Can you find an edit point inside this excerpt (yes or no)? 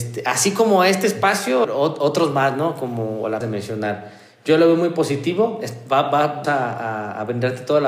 yes